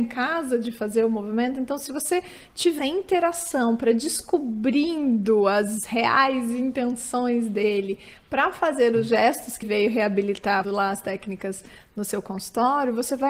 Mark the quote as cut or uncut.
cut